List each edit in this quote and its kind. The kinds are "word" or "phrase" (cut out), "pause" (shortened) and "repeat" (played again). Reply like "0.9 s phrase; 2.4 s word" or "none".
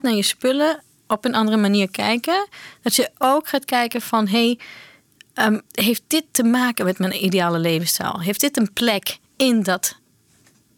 5.7 s pause